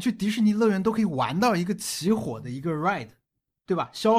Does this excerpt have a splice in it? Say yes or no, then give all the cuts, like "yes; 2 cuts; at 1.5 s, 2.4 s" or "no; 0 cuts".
no; 0 cuts